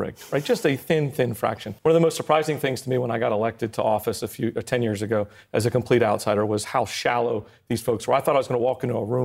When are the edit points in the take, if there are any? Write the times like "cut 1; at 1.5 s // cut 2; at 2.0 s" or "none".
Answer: cut 1; at 1.8 s